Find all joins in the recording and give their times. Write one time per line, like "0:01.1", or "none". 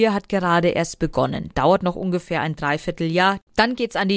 none